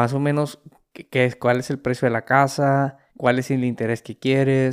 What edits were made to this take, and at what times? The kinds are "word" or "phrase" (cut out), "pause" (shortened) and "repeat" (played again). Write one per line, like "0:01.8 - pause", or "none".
0:03.1 - pause